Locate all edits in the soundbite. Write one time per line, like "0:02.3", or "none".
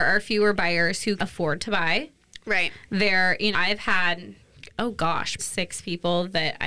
0:01.2
0:03.5
0:05.4

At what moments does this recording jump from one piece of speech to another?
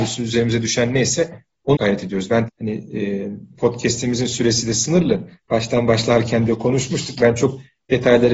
0:01.8
0:02.5
0:03.5
0:06.5

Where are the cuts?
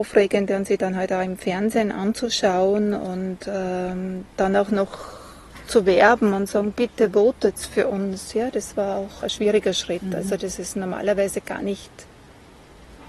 0:09.2

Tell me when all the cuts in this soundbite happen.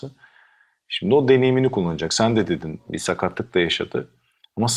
none

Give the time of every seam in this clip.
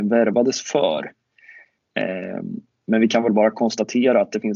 none

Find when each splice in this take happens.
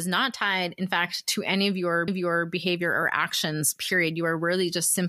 0:02.1

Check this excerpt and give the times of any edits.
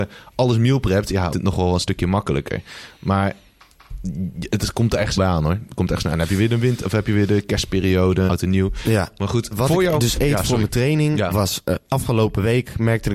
0:01.3
0:05.2
0:08.3
0:09.5
0:11.3

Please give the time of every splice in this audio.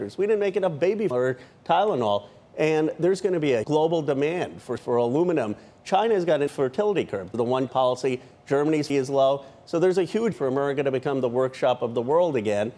0:01.1
0:03.6
0:04.8
0:06.5
0:07.3
0:07.7
0:08.9
0:10.3

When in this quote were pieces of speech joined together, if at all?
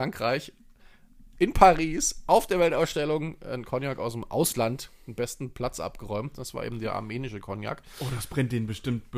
none

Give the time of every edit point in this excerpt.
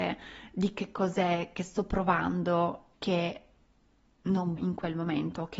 0:02.9
0:04.6

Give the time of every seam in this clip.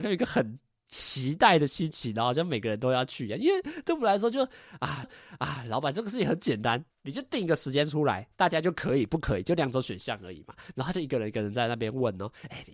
0:05.0
0:06.9

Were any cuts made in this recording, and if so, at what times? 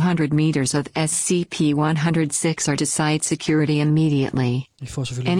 0:02.8

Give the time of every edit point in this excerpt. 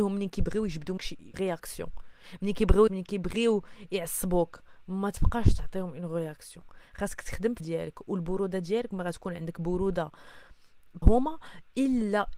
0:01.0
0:01.3
0:02.9
0:07.6
0:11.0

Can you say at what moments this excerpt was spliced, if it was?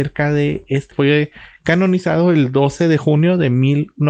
0:00.9

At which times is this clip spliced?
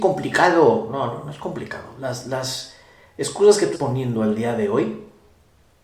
0:03.7

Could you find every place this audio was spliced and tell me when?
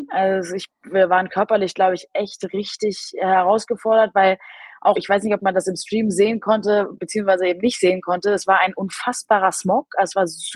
0:05.0
0:07.0

